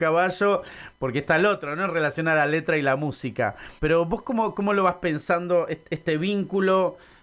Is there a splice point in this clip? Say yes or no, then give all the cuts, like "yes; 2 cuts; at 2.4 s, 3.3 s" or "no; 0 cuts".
yes; 1 cut; at 3.8 s